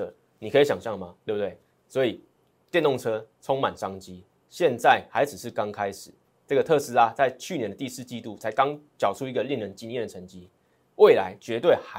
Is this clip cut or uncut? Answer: cut